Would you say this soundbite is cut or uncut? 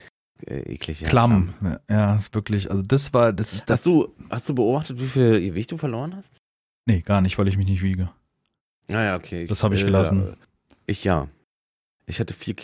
uncut